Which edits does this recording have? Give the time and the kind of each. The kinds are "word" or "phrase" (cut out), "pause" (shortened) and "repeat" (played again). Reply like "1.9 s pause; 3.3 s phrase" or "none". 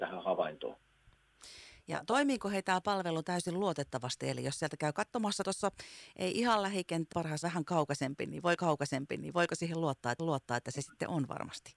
5.4 s phrase; 7.1 s word; 7.4 s phrase; 8.6 s repeat; 10.2 s repeat